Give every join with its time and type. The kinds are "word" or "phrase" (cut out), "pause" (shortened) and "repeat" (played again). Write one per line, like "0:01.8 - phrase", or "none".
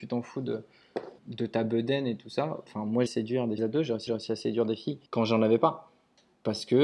0:01.2 - word
0:03.1 - phrase
0:03.6 - phrase
0:04.1 - repeat
0:05.1 - pause